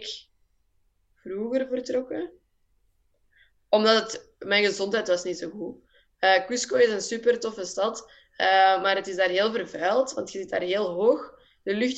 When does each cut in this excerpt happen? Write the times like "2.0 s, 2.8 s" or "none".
none